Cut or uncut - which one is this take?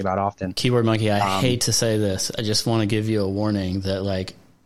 uncut